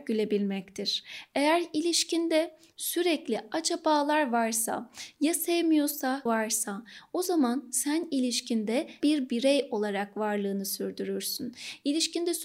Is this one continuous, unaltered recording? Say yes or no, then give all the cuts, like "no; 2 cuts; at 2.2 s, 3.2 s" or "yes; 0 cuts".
no; 2 cuts; at 6.3 s, 9.0 s